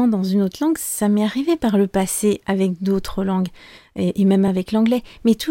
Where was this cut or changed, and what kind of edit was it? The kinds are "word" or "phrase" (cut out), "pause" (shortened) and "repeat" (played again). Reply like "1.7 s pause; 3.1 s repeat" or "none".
none